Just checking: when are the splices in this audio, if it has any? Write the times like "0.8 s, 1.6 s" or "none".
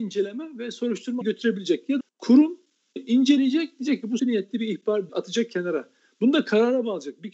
1.2 s, 2.0 s, 3.0 s, 4.2 s, 5.1 s

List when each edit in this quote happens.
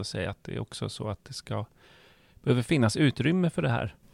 none

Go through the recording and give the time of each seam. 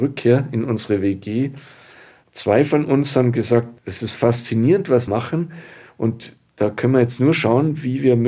3.8 s, 5.1 s

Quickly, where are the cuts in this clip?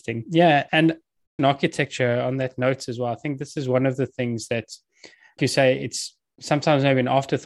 1.4 s, 5.4 s

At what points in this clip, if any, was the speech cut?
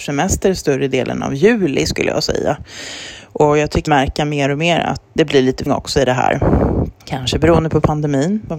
3.9 s, 5.2 s, 5.7 s, 7.0 s

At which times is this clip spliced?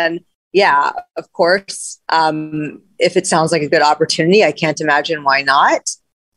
2.0 s

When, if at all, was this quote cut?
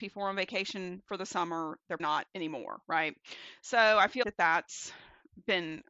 2.0 s, 4.2 s

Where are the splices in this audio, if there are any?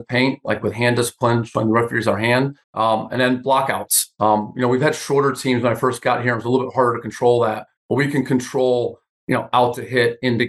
2.6 s, 7.8 s

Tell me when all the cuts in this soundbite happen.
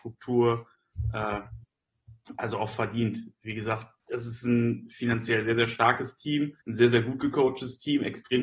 4.0 s, 6.6 s

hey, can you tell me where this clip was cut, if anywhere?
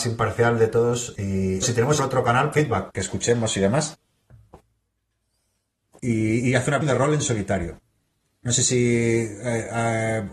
1.6 s, 2.0 s, 2.5 s, 2.9 s, 6.8 s

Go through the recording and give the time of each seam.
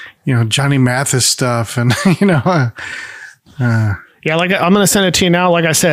none

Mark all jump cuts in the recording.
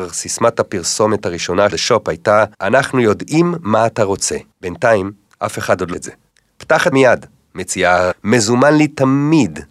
1.7 s, 2.5 s, 4.5 s, 5.9 s, 6.3 s, 6.9 s, 8.1 s

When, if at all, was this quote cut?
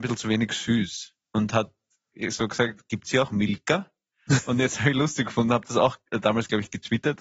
1.2 s

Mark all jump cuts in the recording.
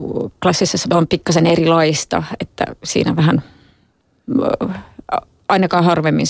0.9 s

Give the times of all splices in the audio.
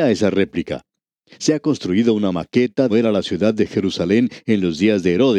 2.9 s

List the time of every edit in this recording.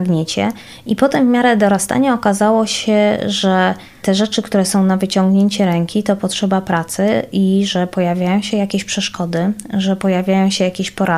none

